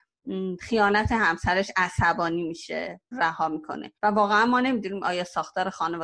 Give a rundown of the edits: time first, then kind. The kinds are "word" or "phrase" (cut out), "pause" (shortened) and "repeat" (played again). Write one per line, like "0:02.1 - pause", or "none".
0:03.1 - phrase
0:04.0 - pause